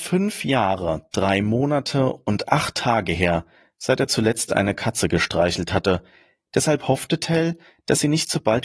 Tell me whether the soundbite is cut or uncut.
uncut